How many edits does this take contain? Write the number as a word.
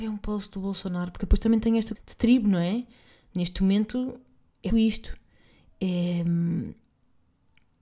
two